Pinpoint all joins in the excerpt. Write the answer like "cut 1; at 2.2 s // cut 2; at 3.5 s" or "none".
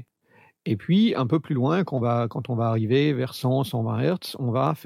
none